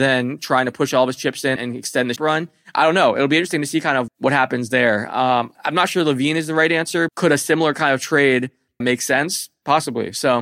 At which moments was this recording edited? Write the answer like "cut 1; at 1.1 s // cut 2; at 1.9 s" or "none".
cut 1; at 1.6 s // cut 2; at 2.2 s // cut 3; at 4.1 s // cut 4; at 5.5 s // cut 5; at 7.1 s // cut 6; at 8.8 s

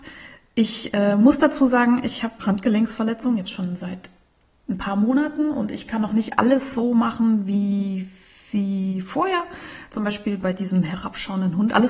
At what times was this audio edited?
cut 1; at 2.4 s

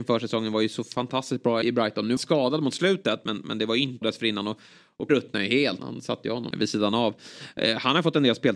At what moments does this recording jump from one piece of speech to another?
cut 1; at 1.6 s // cut 2; at 2.2 s // cut 3; at 4.0 s // cut 4; at 5.1 s // cut 5; at 5.8 s // cut 6; at 6.5 s

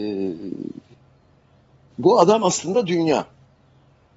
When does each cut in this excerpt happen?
none

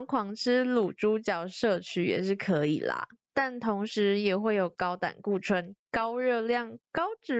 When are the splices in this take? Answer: none

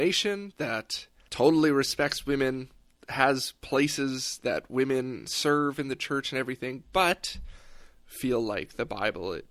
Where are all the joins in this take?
none

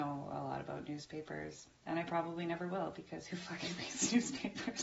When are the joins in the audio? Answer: none

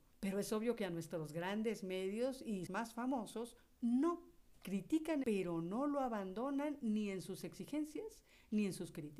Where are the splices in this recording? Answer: cut 1; at 2.7 s // cut 2; at 5.2 s

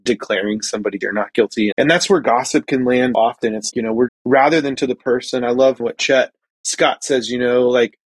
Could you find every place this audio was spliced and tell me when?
cut 1; at 1.0 s // cut 2; at 1.7 s // cut 3; at 3.1 s // cut 4; at 3.7 s // cut 5; at 4.1 s // cut 6; at 4.8 s // cut 7; at 5.8 s

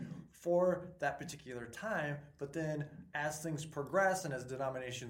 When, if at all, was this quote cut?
none

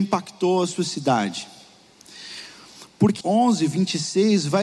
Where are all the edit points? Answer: cut 1; at 3.2 s

